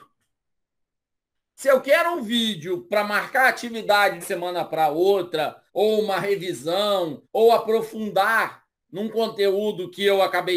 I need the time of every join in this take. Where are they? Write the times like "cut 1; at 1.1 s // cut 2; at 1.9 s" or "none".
cut 1; at 4.2 s // cut 2; at 5.7 s // cut 3; at 7.2 s